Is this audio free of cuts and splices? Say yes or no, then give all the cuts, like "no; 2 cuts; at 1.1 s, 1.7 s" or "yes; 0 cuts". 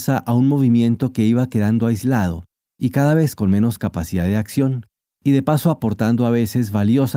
yes; 0 cuts